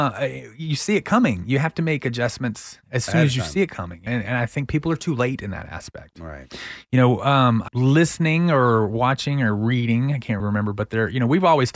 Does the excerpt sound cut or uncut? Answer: cut